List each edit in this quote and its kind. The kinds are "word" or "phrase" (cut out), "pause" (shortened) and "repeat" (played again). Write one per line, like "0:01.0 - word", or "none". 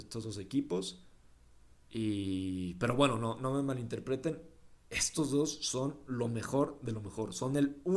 0:01.8 - pause